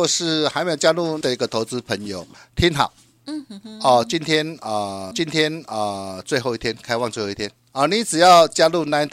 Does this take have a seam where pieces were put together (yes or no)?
yes